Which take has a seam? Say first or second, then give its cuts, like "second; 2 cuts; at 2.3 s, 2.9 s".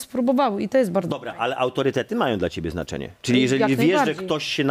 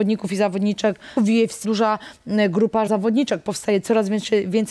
second; 3 cuts; at 1.2 s, 1.6 s, 2.9 s